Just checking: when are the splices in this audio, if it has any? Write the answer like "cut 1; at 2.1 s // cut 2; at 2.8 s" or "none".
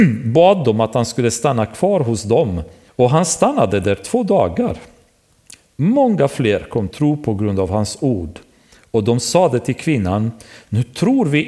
cut 1; at 2.9 s // cut 2; at 6.9 s